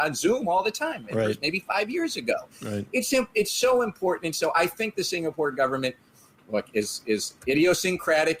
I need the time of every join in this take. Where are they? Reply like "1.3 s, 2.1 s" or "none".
none